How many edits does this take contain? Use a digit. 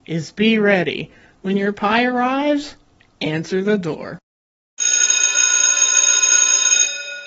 0